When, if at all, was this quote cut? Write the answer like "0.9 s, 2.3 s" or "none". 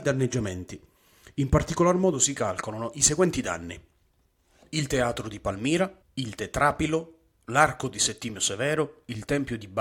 6.0 s